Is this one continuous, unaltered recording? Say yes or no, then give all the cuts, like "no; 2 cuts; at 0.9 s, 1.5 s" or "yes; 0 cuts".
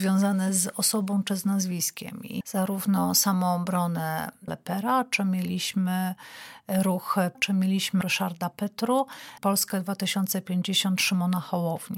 no; 5 cuts; at 2.4 s, 4.5 s, 7.3 s, 8.0 s, 9.4 s